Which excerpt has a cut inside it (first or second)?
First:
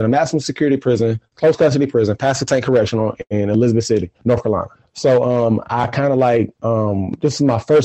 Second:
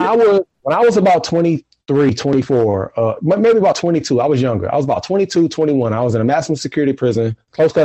first